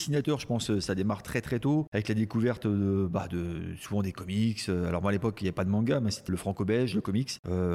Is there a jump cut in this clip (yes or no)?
yes